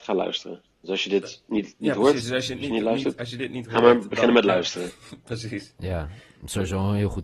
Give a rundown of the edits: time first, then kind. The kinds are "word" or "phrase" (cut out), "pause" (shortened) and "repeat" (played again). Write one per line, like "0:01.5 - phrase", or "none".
none